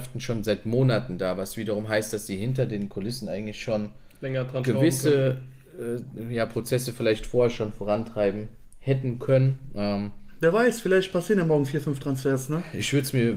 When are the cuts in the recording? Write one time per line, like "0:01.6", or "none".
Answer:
none